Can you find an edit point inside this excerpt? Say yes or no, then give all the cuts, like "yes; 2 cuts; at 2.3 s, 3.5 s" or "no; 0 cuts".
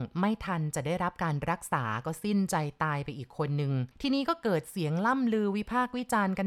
yes; 1 cut; at 3.9 s